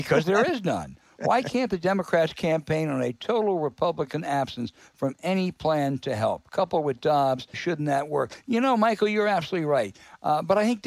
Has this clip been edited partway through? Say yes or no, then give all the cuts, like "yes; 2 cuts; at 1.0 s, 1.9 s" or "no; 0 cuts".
yes; 1 cut; at 7.5 s